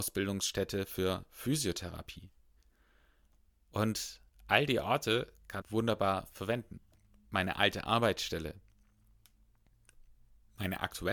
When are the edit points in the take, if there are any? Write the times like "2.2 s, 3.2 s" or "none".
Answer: 5.6 s